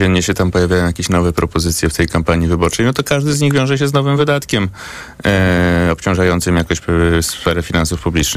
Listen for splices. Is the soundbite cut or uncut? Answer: uncut